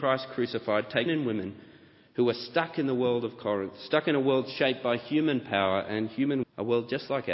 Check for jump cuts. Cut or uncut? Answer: cut